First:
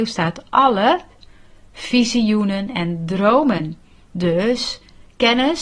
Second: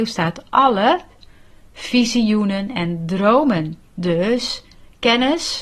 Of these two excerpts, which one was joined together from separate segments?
second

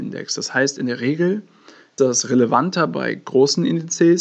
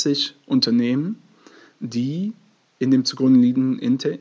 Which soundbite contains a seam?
first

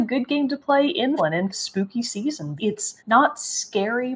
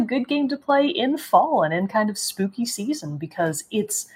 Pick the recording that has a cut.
first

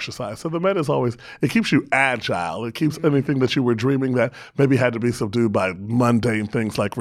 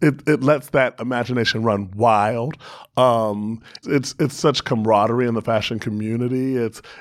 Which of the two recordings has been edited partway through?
second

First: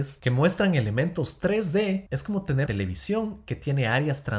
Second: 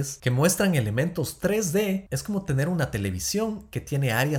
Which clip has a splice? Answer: first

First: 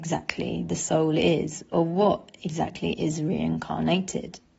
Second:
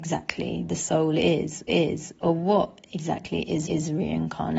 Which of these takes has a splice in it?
second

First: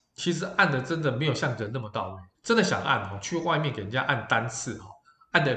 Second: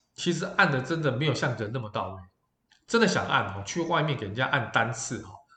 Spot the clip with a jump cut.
first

